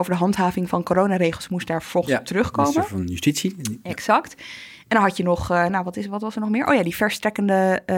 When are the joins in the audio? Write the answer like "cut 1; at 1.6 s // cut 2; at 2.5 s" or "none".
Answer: none